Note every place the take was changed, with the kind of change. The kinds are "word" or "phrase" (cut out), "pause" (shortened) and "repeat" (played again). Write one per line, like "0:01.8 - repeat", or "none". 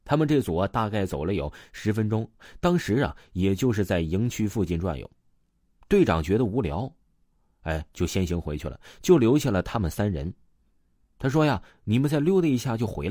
none